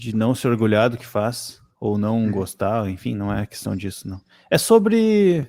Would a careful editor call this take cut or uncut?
uncut